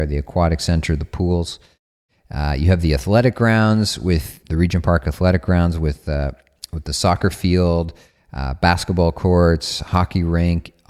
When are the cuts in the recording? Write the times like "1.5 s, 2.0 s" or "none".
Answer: 4.4 s